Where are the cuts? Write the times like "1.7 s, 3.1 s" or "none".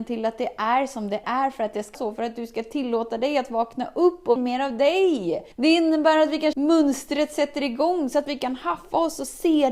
1.2 s, 1.9 s, 4.4 s, 5.5 s, 6.5 s